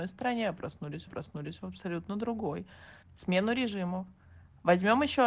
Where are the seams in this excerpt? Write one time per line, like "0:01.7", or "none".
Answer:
0:01.1
0:03.0